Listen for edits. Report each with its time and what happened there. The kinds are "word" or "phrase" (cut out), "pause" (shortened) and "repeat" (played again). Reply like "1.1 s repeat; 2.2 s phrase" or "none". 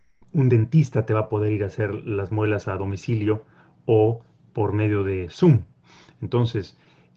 none